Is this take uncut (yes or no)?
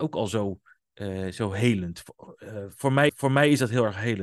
no